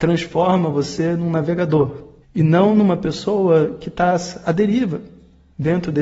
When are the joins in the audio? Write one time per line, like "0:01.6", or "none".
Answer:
0:02.2